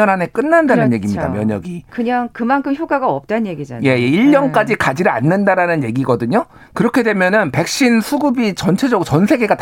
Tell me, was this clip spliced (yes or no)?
no